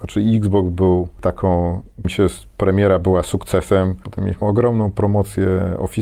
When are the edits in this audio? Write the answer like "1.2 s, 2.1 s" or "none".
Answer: 2.0 s, 4.4 s